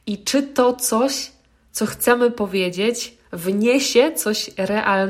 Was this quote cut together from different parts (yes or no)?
no